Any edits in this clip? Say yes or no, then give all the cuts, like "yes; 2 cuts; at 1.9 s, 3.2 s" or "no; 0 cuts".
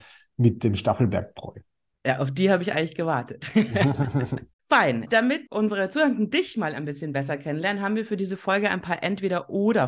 yes; 2 cuts; at 4.6 s, 5.5 s